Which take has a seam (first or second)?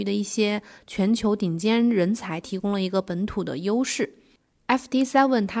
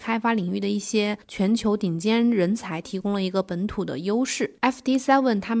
second